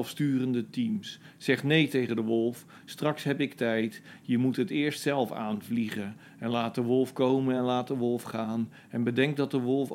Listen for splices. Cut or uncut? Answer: uncut